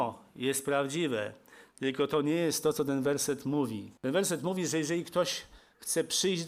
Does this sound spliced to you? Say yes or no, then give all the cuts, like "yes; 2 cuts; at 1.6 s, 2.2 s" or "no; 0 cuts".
yes; 1 cut; at 4.0 s